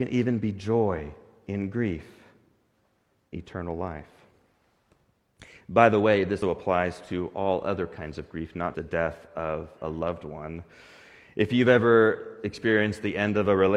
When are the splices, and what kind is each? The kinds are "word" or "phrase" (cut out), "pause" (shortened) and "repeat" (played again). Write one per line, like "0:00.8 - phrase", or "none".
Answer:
0:03.3 - word
0:06.4 - word
0:08.7 - word

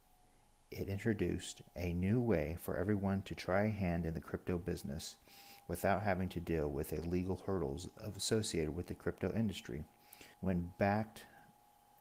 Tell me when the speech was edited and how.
0:10.3 - pause

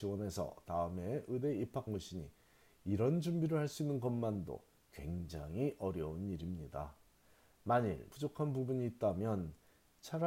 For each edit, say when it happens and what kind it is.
0:01.9 - word
0:08.1 - word

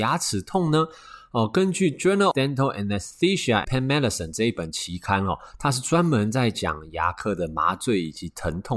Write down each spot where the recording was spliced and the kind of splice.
0:02.3 - word
0:03.6 - word

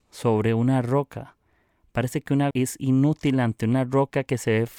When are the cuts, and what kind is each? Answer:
0:02.5 - word

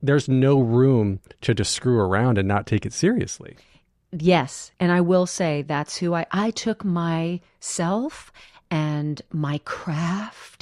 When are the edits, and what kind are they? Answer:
none

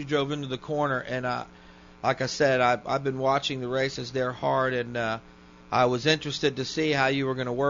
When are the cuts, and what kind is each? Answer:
none

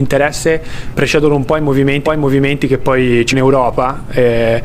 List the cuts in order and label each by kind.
0:00.9 - word
0:02.0 - repeat
0:03.3 - word

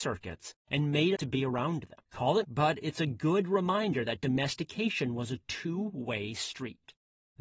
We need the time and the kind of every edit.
0:01.2 - phrase
0:02.1 - pause
0:02.4 - word

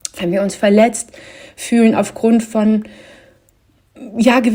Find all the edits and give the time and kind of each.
none

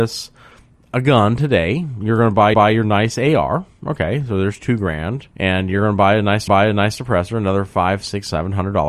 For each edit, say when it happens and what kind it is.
0:02.5 - repeat
0:05.3 - pause
0:06.5 - repeat

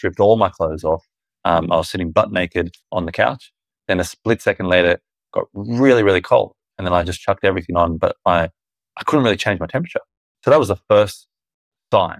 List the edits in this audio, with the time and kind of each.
0:02.8 - pause

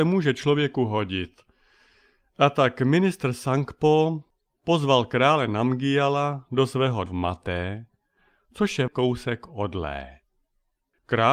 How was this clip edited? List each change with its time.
0:07.1 - word
0:08.9 - word

